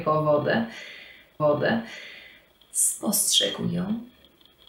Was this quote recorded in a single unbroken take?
no; 1 cut; at 1.4 s

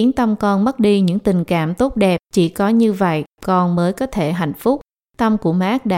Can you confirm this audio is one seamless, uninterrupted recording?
no; 1 cut; at 2.2 s

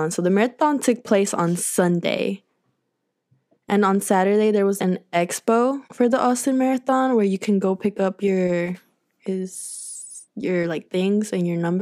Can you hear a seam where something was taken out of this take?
yes; 2 cuts; at 4.8 s, 5.8 s

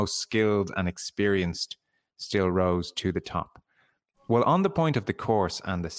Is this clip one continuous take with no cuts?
yes; 0 cuts

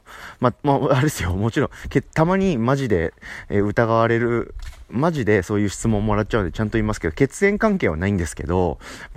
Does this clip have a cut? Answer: no; 0 cuts

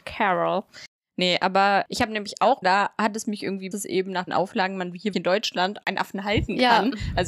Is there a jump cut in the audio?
yes; 5 cuts; at 2.6 s, 3.7 s, 4.3 s, 5.1 s, 5.8 s

